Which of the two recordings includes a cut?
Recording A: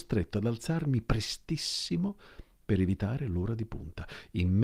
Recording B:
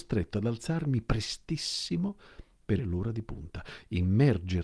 B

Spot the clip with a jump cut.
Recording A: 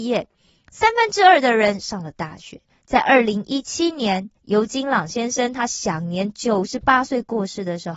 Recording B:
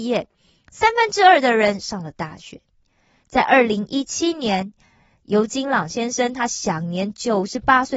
A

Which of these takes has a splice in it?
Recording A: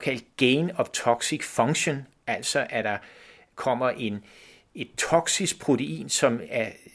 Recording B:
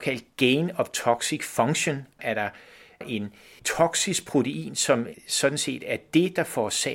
B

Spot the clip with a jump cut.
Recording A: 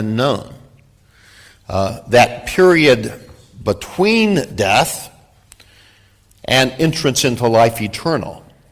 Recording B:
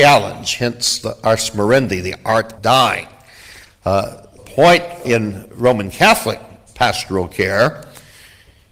B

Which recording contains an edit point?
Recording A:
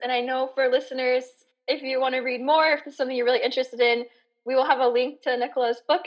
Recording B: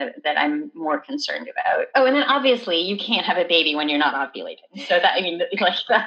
B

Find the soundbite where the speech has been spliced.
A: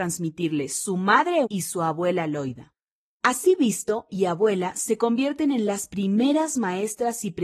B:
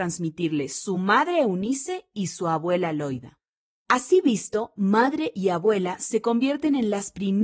A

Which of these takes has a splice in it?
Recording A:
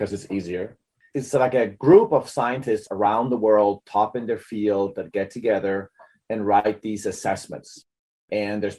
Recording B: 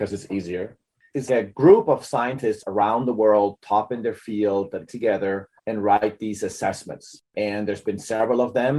B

